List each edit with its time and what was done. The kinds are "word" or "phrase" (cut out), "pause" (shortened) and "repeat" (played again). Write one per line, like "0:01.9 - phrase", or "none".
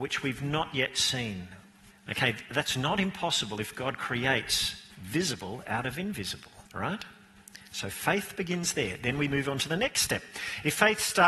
0:01.9 - pause
0:04.9 - pause
0:06.7 - pause